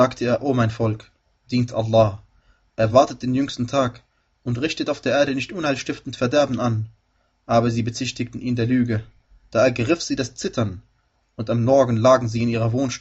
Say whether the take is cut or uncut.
uncut